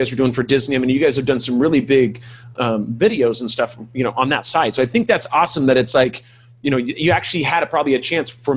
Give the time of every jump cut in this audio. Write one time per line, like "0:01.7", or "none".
0:02.5

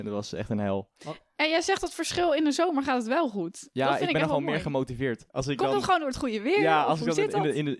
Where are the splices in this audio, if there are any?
0:01.0
0:05.3

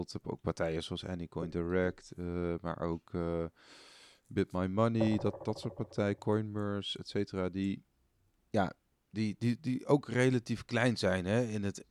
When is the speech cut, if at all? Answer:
none

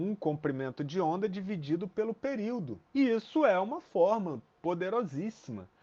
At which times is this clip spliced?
0:02.9

